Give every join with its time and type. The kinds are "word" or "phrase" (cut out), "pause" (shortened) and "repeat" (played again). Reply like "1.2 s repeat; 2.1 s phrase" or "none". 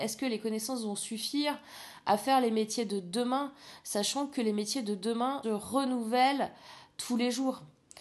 5.4 s word